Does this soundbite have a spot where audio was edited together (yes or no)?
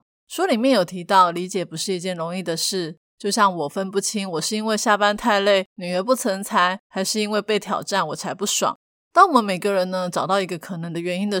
no